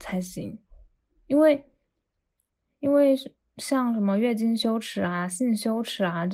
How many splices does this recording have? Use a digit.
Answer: 0